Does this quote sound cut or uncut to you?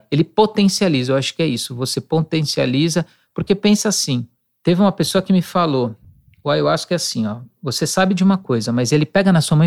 uncut